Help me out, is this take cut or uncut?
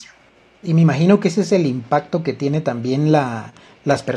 uncut